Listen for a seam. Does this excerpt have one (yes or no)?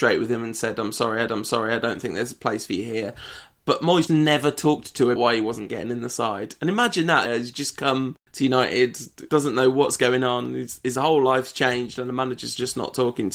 yes